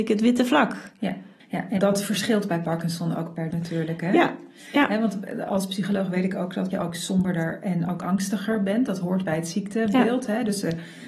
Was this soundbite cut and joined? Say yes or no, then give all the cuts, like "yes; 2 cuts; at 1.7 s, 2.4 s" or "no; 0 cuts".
yes; 4 cuts; at 1.4 s, 1.8 s, 3.5 s, 6.7 s